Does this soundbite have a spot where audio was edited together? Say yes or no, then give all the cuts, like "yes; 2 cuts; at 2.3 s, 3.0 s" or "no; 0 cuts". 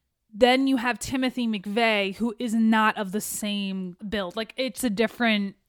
yes; 2 cuts; at 4.0 s, 4.8 s